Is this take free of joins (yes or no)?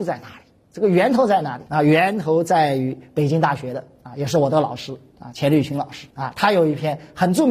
no